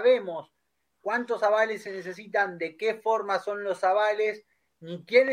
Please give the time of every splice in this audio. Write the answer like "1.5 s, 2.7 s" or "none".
none